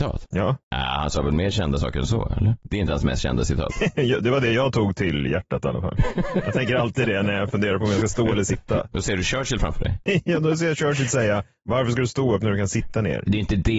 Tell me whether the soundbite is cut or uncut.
uncut